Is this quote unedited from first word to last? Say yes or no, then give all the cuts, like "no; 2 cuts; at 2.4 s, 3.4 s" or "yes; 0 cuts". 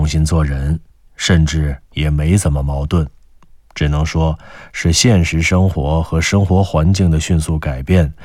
no; 1 cut; at 1.8 s